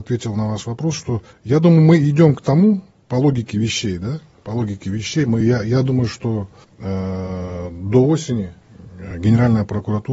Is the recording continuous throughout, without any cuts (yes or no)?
yes